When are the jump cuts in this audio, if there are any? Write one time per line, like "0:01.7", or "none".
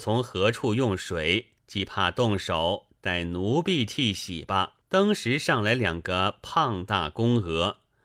0:01.6
0:04.8